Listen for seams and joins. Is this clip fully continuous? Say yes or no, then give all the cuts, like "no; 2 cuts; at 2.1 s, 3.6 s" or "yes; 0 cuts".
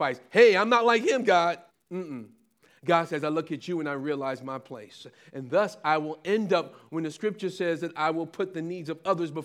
no; 1 cut; at 1.7 s